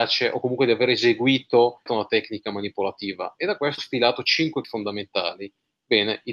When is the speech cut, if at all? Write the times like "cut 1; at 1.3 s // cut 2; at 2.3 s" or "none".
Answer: cut 1; at 1.9 s // cut 2; at 3.8 s // cut 3; at 4.6 s